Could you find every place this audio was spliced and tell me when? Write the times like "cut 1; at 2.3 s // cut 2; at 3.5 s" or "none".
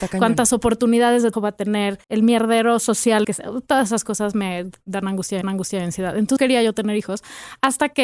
cut 1; at 1.3 s // cut 2; at 2.0 s // cut 3; at 3.2 s // cut 4; at 5.4 s // cut 5; at 6.4 s